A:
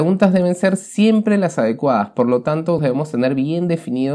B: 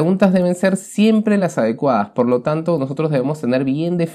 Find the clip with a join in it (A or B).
A